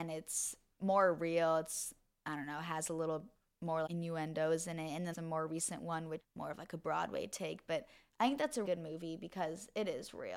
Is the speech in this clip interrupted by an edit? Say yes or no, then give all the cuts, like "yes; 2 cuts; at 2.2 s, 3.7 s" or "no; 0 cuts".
yes; 4 cuts; at 3.9 s, 5.1 s, 6.2 s, 8.6 s